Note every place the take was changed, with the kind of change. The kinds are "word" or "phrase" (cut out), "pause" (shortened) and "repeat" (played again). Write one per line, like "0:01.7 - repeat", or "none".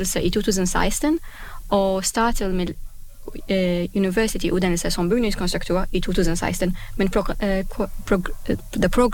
none